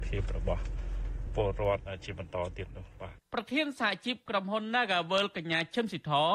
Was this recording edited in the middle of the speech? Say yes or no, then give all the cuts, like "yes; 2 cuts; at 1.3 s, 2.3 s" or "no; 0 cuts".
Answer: yes; 1 cut; at 3.2 s